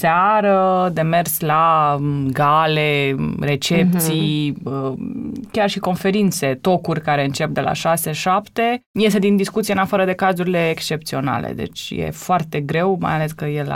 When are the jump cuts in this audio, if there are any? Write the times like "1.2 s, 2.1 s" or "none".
8.9 s